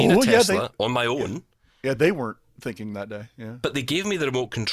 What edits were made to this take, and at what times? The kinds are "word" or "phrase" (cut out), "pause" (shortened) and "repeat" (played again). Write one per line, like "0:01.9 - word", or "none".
none